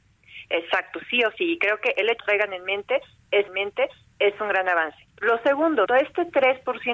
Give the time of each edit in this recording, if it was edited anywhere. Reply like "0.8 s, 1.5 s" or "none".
2.2 s, 3.5 s, 5.1 s, 5.9 s